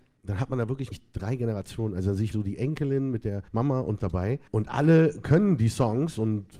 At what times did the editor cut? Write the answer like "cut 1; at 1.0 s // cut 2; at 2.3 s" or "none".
cut 1; at 0.9 s // cut 2; at 2.3 s // cut 3; at 3.5 s // cut 4; at 4.0 s // cut 5; at 4.5 s